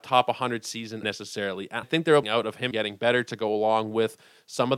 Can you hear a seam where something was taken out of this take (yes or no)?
yes